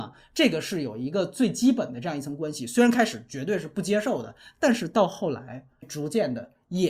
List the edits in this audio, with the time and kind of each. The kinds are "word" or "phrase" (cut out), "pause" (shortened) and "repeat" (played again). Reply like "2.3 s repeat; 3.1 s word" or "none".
5.8 s word

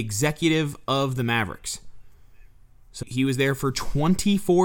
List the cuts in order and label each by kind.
3.0 s word

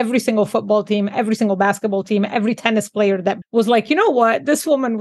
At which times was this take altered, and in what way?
3.4 s word

